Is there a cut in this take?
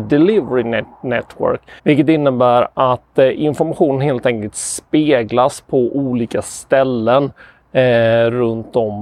yes; 1 cut; at 1.8 s

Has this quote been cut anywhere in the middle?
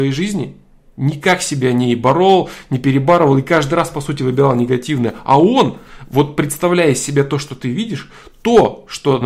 no; 0 cuts

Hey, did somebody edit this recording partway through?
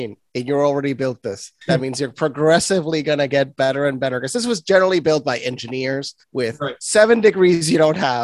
yes; 2 cuts; at 1.6 s, 6.2 s

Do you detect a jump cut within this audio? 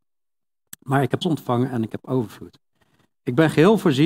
yes; 1 cut; at 1.2 s

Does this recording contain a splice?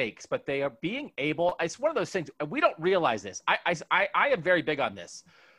no; 0 cuts

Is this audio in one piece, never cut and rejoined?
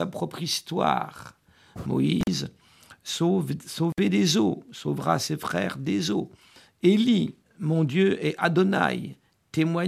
yes; 0 cuts

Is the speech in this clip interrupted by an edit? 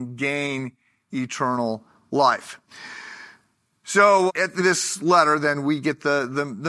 yes; 2 cuts; at 4.3 s, 4.6 s

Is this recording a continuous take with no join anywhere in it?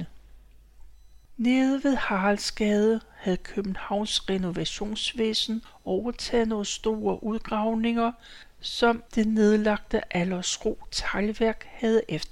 yes; 0 cuts

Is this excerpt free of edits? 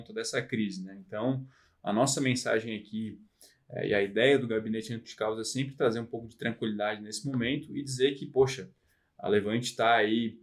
yes; 0 cuts

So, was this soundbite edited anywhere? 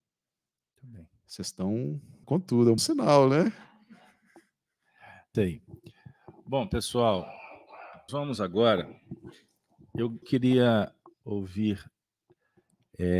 yes; 5 cuts; at 2.2 s, 2.8 s, 5.3 s, 8.1 s, 10.2 s

